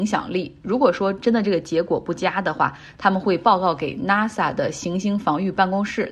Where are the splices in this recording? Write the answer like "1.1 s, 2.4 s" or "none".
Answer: none